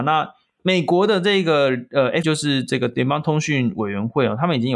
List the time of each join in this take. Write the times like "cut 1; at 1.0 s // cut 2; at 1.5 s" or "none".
cut 1; at 2.2 s

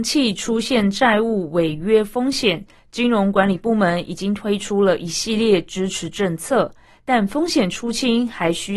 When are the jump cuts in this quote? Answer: none

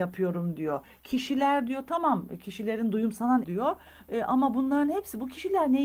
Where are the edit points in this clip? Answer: cut 1; at 3.4 s

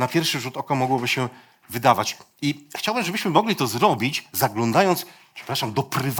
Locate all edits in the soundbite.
none

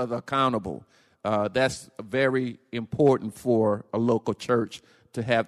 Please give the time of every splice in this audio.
none

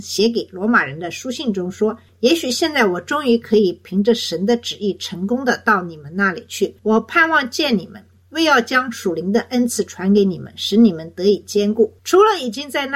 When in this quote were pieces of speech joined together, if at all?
cut 1; at 6.8 s // cut 2; at 12.0 s

